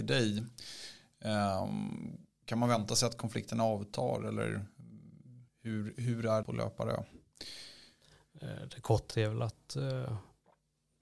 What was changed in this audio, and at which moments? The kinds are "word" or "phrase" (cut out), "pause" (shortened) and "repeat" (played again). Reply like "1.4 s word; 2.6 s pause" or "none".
2.4 s word; 5.5 s pause; 6.4 s word; 9.1 s word